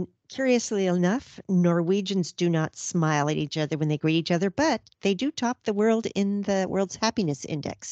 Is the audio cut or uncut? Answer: uncut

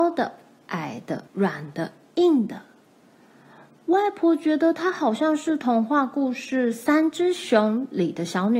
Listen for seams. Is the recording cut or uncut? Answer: cut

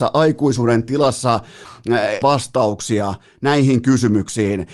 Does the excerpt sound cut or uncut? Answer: cut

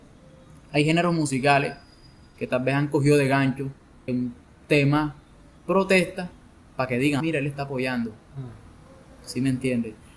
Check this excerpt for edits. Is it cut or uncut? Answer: cut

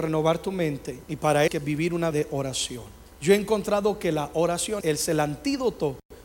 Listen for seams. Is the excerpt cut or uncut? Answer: cut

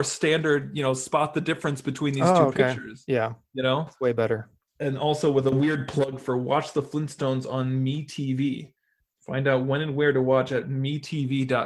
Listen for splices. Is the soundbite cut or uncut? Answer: uncut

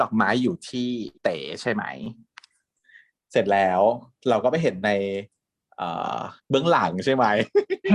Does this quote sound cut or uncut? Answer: cut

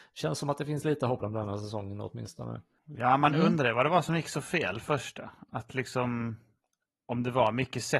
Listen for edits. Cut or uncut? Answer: cut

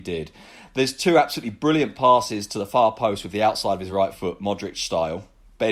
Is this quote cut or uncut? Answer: uncut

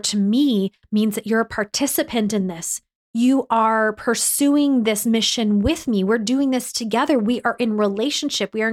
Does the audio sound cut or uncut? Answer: uncut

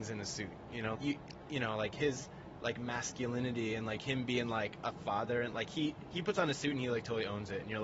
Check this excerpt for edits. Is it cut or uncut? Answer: cut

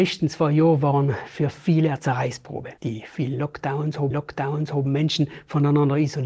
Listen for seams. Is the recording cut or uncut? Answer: cut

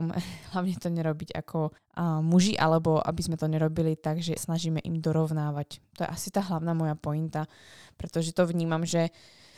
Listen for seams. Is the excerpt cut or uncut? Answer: cut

